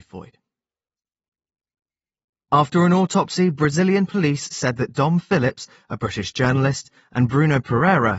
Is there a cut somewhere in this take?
no; 0 cuts

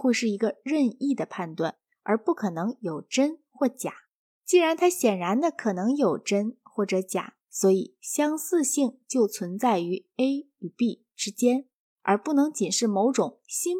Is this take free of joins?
yes; 0 cuts

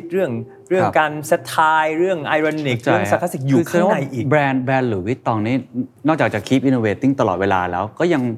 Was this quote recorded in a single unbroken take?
no; 1 cut; at 6.0 s

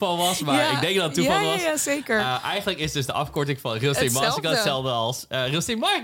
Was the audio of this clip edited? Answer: no; 0 cuts

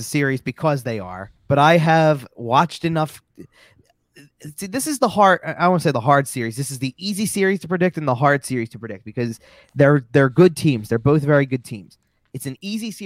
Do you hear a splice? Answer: yes; 1 cut; at 1.4 s

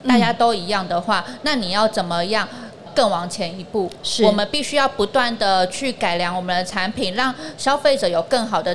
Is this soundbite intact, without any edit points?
yes; 0 cuts

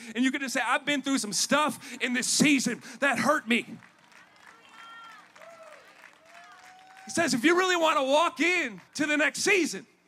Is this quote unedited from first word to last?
no; 1 cut; at 8.9 s

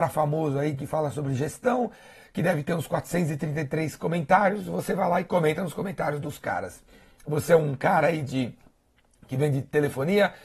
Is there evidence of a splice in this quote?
no; 0 cuts

